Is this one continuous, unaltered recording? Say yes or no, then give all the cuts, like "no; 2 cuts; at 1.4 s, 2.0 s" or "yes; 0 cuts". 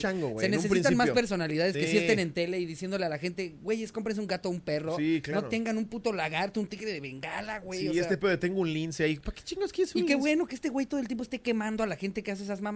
yes; 0 cuts